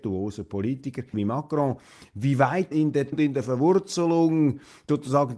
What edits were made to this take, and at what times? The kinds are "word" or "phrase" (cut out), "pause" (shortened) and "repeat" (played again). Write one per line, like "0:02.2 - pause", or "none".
0:01.1 - word
0:02.7 - word
0:03.1 - word

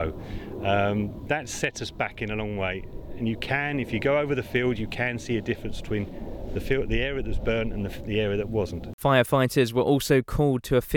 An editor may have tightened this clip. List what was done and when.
none

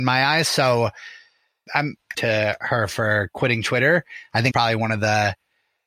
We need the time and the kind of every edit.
0:01.7 - word
0:02.1 - word
0:04.5 - word

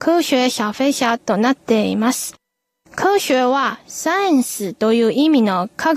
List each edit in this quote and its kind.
none

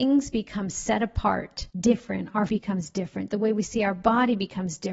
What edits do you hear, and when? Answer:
0:01.7 - pause
0:02.5 - word

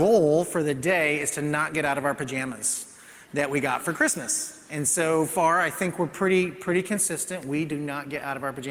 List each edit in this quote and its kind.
none

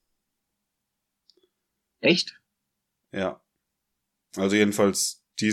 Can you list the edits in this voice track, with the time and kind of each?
none

